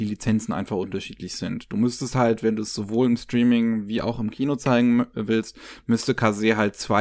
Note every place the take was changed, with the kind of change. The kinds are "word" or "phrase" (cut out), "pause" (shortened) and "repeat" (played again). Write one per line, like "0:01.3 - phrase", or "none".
none